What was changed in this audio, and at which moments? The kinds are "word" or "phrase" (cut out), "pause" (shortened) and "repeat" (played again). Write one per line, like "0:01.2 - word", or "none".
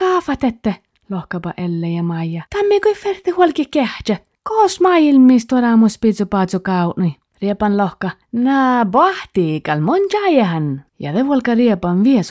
0:02.5 - pause
0:04.3 - pause
0:07.3 - pause
0:08.2 - pause
0:10.9 - pause